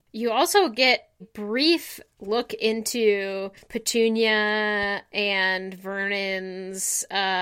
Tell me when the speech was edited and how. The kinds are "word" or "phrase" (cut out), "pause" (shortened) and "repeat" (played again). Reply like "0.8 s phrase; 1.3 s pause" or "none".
1.2 s word; 3.6 s pause